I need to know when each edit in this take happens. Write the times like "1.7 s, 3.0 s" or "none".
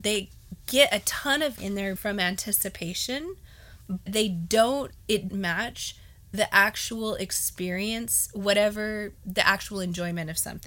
1.6 s, 2.0 s, 4.1 s, 5.3 s